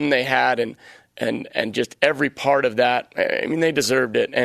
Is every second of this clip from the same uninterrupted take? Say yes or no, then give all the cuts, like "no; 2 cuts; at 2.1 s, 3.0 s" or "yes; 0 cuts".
yes; 0 cuts